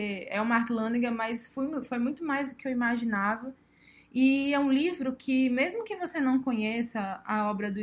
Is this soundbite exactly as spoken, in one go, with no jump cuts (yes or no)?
yes